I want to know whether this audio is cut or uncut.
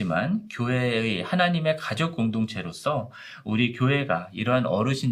uncut